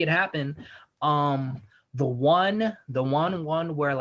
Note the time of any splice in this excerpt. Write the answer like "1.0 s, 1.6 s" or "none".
none